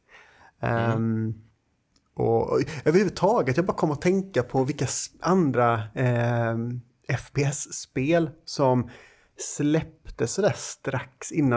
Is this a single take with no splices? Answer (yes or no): yes